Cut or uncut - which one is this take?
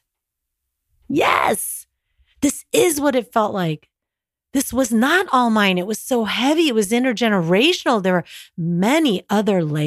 uncut